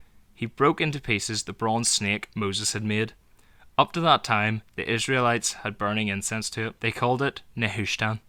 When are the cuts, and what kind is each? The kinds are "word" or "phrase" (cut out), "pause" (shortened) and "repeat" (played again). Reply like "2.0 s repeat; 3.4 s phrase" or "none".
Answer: 5.8 s word; 6.8 s pause